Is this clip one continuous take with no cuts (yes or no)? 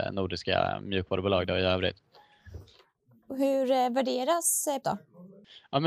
no